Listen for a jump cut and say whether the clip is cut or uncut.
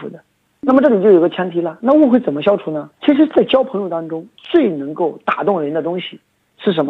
cut